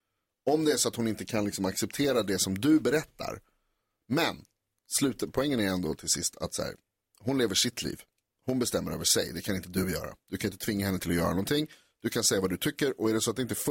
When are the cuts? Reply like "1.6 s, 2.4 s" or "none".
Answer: none